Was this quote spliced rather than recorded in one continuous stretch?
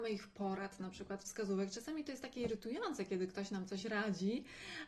no; 0 cuts

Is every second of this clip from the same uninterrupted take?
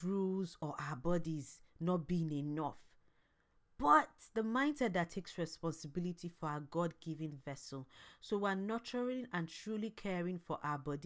yes; 0 cuts

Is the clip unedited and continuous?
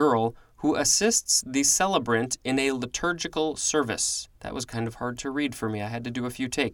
no; 1 cut; at 4.4 s

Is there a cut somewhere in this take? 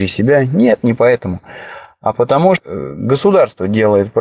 yes; 1 cut; at 2.6 s

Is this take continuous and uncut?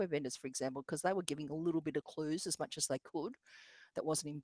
yes; 0 cuts

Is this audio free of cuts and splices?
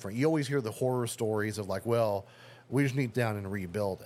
no; 1 cut; at 3.1 s

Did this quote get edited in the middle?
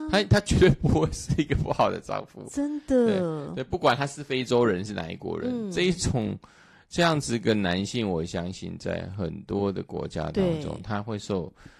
no; 0 cuts

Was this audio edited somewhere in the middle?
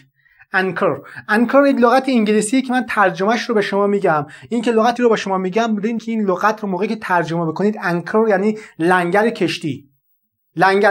yes; 2 cuts; at 5.0 s, 6.0 s

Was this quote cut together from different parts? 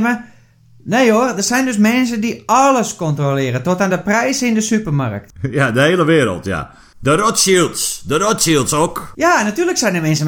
no; 0 cuts

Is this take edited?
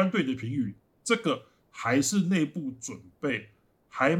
no; 0 cuts

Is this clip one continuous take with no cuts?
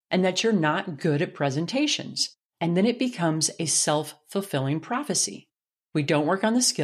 no; 1 cut; at 2.5 s

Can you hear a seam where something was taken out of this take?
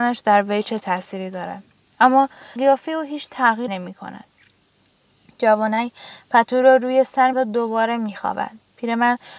yes; 3 cuts; at 2.6 s, 3.7 s, 7.3 s

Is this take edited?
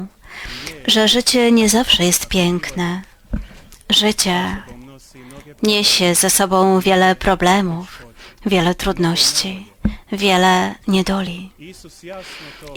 no; 0 cuts

